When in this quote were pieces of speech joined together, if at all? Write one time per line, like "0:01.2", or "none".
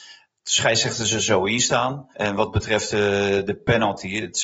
0:02.1